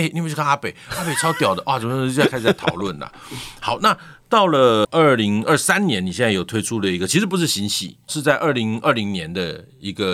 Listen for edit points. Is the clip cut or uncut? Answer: cut